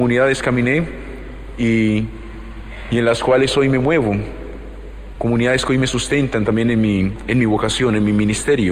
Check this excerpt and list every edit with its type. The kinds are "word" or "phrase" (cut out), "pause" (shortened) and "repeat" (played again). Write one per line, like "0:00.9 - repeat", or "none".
none